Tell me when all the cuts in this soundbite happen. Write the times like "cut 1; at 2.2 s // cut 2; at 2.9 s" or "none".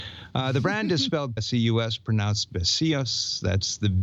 cut 1; at 1.4 s